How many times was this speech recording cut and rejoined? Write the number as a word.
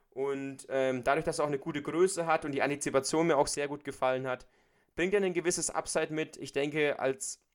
zero